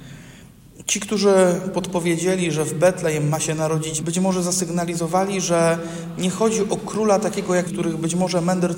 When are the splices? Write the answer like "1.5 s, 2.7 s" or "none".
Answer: 4.0 s, 7.6 s